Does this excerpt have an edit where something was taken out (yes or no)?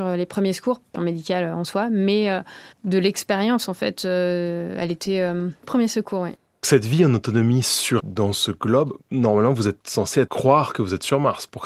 yes